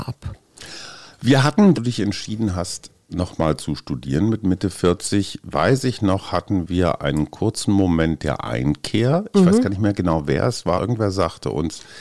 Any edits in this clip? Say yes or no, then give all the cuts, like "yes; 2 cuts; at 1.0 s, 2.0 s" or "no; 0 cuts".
yes; 2 cuts; at 1.7 s, 10.8 s